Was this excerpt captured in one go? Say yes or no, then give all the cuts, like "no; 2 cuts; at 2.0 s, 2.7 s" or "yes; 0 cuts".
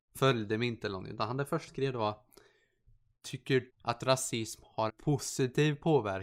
no; 3 cuts; at 1.7 s, 3.7 s, 4.9 s